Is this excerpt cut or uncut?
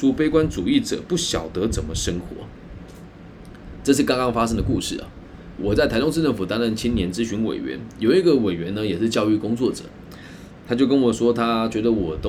cut